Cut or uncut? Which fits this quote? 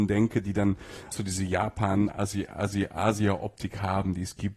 cut